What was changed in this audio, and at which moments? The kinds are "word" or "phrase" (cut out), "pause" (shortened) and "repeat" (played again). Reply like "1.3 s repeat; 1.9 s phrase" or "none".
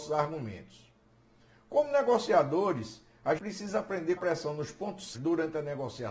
3.4 s word; 4.2 s word; 5.1 s word